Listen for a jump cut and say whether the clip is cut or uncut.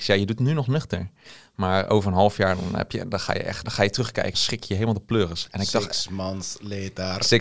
cut